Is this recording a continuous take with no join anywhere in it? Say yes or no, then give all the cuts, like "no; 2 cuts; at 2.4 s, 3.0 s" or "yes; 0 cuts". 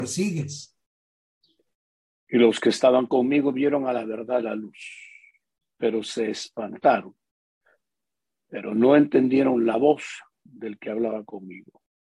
yes; 0 cuts